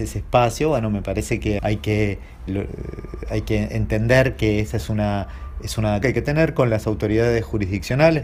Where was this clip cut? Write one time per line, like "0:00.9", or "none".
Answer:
0:01.6
0:02.5
0:06.0